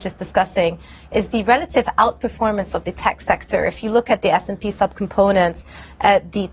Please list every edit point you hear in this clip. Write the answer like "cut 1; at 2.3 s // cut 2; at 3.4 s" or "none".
none